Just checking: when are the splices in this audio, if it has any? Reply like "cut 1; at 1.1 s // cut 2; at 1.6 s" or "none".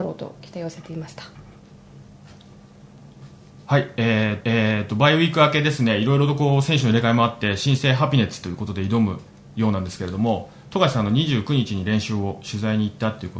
cut 1; at 3.5 s // cut 2; at 4.4 s